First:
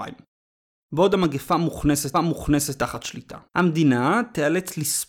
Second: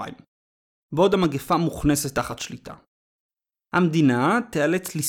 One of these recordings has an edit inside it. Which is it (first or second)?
first